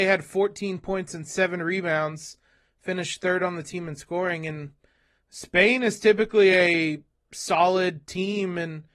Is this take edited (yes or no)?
no